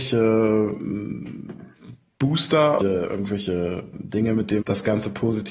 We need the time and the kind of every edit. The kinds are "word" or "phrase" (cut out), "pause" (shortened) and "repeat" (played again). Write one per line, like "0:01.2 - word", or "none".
0:02.8 - word
0:04.6 - word